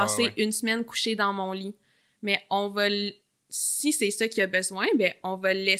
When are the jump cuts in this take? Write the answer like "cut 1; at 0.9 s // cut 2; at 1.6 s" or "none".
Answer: none